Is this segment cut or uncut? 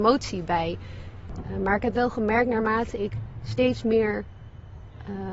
uncut